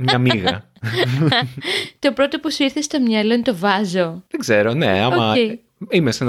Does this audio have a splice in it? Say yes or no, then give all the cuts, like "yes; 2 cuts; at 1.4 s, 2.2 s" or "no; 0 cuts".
yes; 1 cut; at 4.3 s